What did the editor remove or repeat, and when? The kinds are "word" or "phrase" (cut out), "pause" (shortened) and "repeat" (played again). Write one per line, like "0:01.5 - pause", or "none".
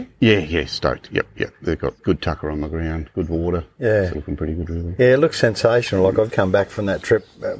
0:02.0 - pause
0:04.1 - phrase
0:06.3 - word